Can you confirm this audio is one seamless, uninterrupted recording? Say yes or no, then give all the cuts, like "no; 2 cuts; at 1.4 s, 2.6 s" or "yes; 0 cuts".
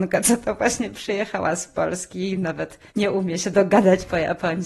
no; 1 cut; at 2.9 s